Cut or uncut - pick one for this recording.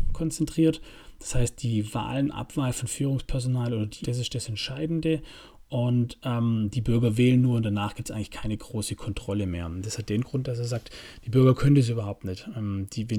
cut